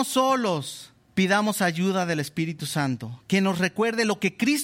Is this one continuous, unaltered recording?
no; 1 cut; at 1.1 s

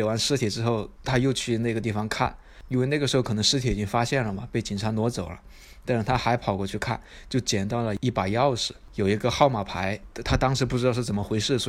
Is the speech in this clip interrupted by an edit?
yes; 1 cut; at 1.0 s

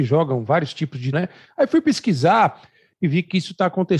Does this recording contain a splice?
yes; 1 cut; at 1.1 s

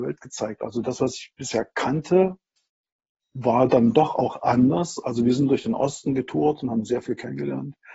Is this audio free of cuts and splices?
yes; 0 cuts

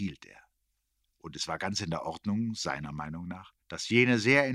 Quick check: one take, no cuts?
no; 1 cut; at 3.6 s

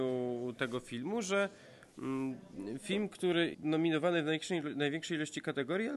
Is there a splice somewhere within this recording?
yes; 1 cut; at 3.5 s

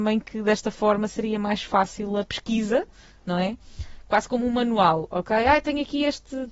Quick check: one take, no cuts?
yes; 0 cuts

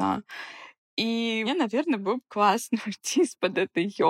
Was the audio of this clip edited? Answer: yes; 1 cut; at 1.4 s

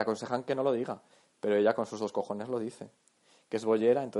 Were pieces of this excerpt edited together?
no; 0 cuts

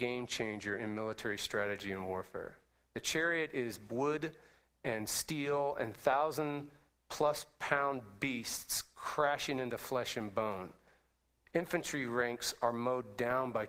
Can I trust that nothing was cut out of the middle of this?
yes; 0 cuts

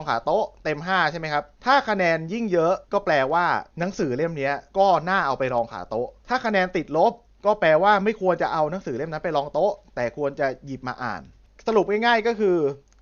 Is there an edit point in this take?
yes; 5 cuts; at 1.5 s, 3.7 s, 4.7 s, 6.2 s, 7.2 s

